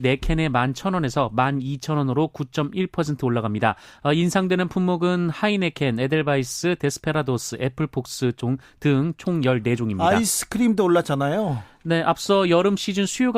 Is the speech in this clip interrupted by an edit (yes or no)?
no